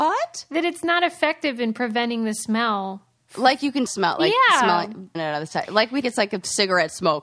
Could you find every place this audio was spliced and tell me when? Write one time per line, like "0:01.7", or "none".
0:03.9
0:05.1
0:06.0